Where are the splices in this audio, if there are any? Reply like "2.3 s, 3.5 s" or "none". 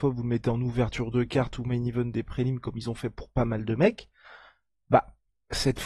none